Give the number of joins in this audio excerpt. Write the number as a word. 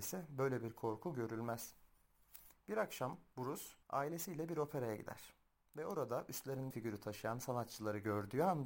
two